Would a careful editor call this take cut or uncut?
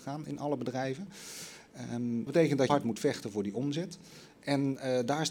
cut